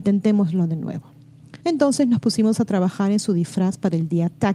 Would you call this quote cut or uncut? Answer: cut